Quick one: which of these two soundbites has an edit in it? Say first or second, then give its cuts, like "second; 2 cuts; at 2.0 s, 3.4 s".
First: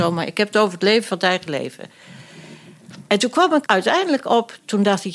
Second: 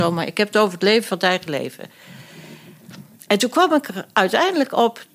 first; 2 cuts; at 3.1 s, 3.6 s